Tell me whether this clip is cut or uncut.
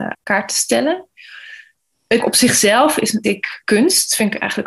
cut